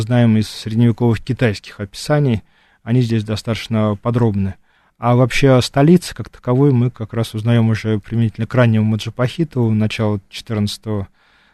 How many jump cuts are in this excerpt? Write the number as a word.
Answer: zero